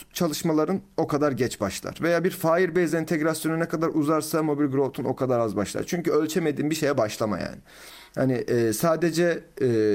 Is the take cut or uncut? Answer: uncut